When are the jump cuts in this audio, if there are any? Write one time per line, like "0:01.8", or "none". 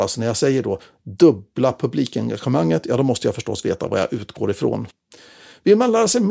none